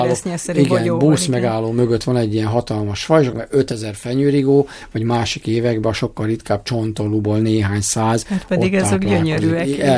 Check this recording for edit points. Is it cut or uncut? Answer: cut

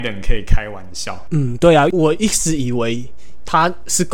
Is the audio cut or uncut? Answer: uncut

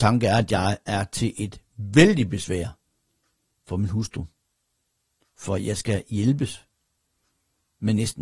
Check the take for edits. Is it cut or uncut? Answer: uncut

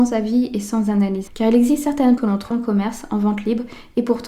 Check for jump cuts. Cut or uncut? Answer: cut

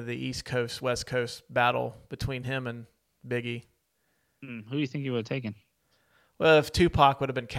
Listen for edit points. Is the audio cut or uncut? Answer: uncut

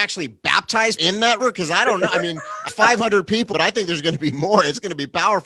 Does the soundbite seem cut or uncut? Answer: cut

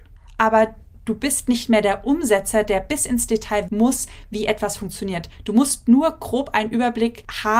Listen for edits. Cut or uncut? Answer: cut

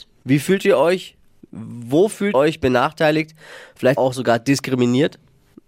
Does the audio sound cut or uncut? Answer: cut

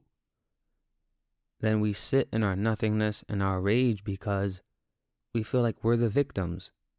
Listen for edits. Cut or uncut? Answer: uncut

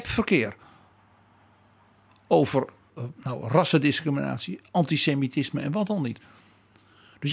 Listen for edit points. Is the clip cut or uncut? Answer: uncut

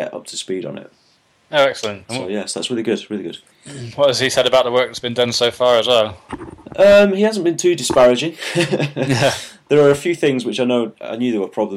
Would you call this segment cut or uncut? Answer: uncut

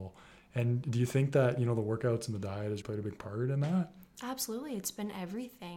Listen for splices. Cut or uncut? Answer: cut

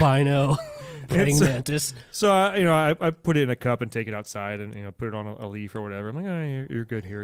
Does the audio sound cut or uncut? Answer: uncut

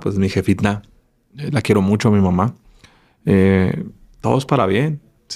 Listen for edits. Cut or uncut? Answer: uncut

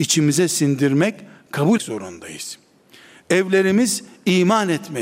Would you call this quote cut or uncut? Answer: cut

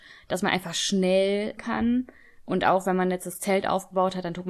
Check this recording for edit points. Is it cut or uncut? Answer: cut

